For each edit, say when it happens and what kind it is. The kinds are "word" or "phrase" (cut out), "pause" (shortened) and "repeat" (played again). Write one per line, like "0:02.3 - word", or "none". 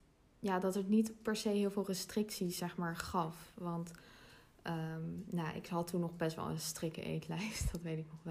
none